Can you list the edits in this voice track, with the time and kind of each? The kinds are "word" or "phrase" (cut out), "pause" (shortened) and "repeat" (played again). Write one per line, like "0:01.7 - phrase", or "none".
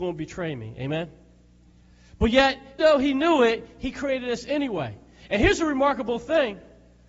0:02.8 - word